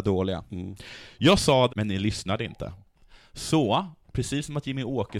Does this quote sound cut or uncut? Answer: cut